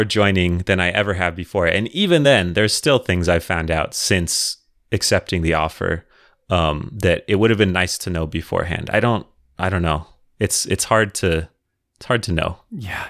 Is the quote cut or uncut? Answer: uncut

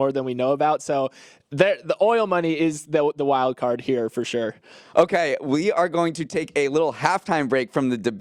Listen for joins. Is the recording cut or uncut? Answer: uncut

